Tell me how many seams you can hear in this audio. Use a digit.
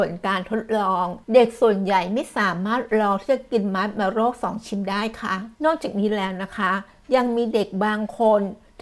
2